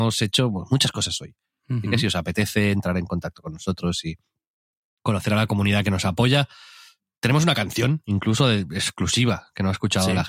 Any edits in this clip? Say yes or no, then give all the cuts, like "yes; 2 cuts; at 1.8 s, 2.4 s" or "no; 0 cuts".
no; 0 cuts